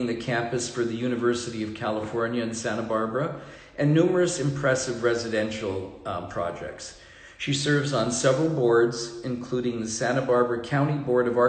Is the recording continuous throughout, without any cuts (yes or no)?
yes